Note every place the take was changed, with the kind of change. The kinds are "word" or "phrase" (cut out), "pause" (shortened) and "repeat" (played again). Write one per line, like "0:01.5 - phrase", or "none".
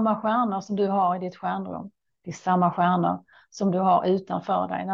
none